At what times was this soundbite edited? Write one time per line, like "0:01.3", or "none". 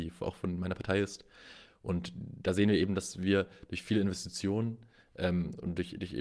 none

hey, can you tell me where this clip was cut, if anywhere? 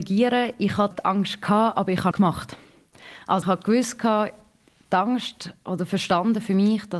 0:00.9
0:02.1
0:03.4

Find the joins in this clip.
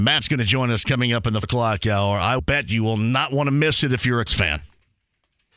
0:01.4
0:02.4
0:04.3

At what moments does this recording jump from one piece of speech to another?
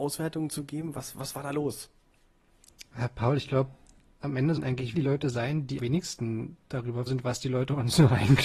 0:04.6
0:04.9
0:05.8
0:07.1

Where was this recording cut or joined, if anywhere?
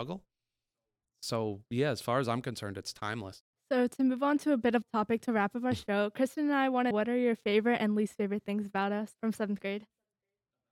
0:01.7
0:04.8
0:06.9
0:09.1

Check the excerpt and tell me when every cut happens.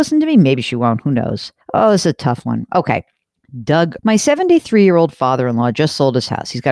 0:01.6
0:04.0

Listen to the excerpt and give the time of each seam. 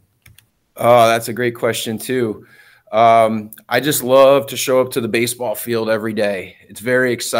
none

